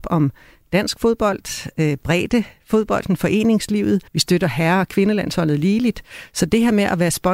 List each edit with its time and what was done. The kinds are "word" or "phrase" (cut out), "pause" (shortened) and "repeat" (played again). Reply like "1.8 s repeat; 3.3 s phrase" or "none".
4.1 s pause